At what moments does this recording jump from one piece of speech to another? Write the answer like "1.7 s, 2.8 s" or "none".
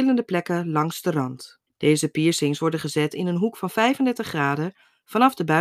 1.7 s